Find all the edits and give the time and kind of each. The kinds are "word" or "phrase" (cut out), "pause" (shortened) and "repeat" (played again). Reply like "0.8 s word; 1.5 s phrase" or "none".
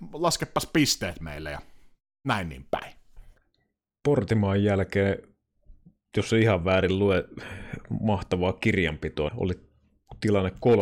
9.3 s word